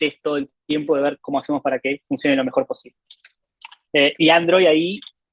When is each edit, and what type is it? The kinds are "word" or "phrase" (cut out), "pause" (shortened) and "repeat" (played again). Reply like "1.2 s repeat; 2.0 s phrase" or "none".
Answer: none